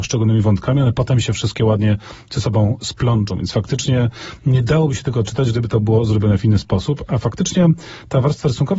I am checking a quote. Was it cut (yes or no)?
no